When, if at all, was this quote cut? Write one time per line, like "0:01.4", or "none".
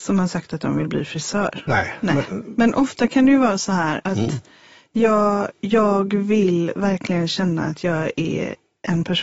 none

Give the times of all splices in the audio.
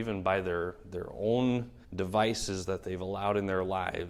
0:01.8

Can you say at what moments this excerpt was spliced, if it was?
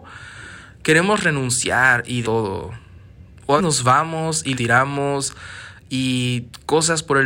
0:02.2
0:03.6
0:04.5

